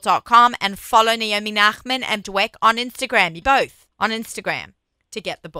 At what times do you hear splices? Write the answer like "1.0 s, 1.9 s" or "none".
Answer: 2.2 s, 3.4 s, 3.9 s